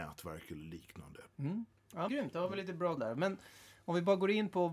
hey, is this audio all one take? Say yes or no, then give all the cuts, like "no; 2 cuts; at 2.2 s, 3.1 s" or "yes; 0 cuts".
no; 2 cuts; at 2.1 s, 3.0 s